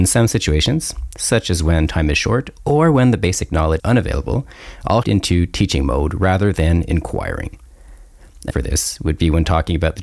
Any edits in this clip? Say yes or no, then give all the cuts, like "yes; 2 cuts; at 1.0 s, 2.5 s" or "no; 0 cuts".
yes; 3 cuts; at 3.8 s, 5.0 s, 8.5 s